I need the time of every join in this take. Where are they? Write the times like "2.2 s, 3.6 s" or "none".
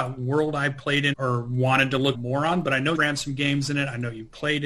1.1 s, 2.1 s, 2.9 s